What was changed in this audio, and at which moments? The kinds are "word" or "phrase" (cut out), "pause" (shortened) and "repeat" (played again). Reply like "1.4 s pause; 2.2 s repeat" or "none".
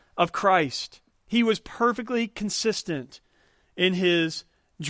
1.1 s pause